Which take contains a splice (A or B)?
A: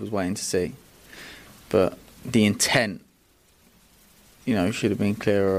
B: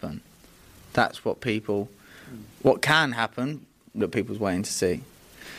B